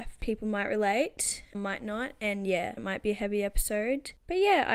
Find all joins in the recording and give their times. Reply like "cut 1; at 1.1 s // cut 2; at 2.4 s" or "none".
cut 1; at 1.5 s // cut 2; at 2.8 s

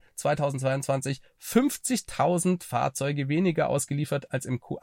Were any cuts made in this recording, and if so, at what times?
none

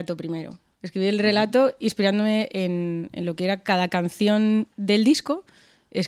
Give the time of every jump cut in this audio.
cut 1; at 4.7 s

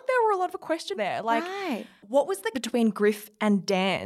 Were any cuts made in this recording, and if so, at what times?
cut 1; at 0.9 s // cut 2; at 2.5 s

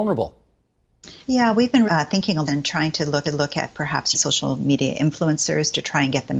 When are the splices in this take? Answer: cut 1; at 1.2 s // cut 2; at 1.9 s // cut 3; at 2.5 s // cut 4; at 3.2 s // cut 5; at 4.1 s

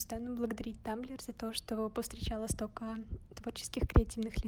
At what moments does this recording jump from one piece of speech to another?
none

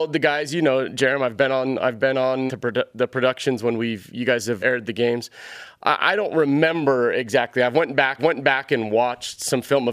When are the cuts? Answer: cut 1; at 2.5 s // cut 2; at 4.6 s // cut 3; at 8.2 s

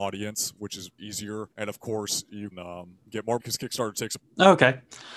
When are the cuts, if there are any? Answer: cut 1; at 1.0 s // cut 2; at 1.5 s // cut 3; at 2.5 s // cut 4; at 3.0 s // cut 5; at 3.4 s // cut 6; at 4.2 s

